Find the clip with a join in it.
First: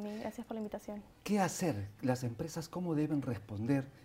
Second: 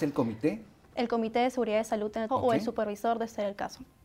second; 1 cut; at 2.3 s

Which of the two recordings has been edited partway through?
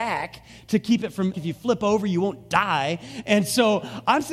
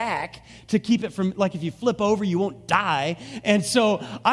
first; 1 cut; at 1.3 s

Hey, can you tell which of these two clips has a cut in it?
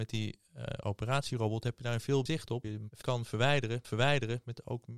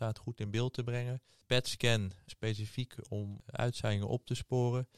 first; 4 cuts; at 2.3 s, 2.6 s, 3.0 s, 3.8 s

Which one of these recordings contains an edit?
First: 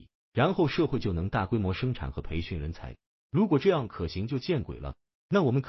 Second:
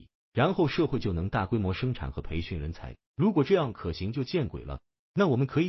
second; 1 cut; at 3.0 s

